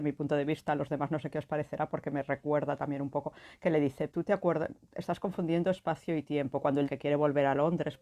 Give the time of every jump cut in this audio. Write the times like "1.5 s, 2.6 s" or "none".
4.1 s, 6.9 s